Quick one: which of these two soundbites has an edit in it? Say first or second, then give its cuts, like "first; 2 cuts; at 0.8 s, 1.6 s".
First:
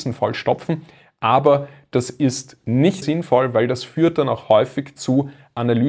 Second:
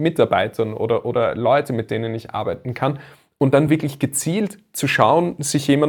first; 1 cut; at 3.0 s